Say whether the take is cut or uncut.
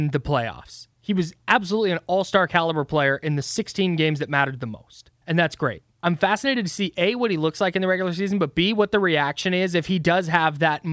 cut